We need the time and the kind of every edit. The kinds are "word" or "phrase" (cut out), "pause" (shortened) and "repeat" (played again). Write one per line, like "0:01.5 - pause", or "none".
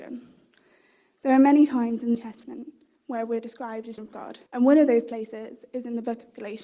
0:02.1 - word
0:04.0 - word
0:04.5 - pause